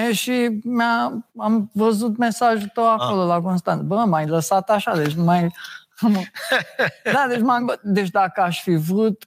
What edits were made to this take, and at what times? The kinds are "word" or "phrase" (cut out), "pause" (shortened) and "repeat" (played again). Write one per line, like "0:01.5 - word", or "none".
0:01.3 - pause
0:07.6 - word